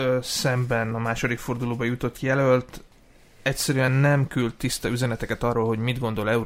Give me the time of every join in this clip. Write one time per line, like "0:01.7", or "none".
none